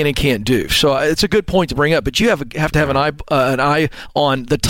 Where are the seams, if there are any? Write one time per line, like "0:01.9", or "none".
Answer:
none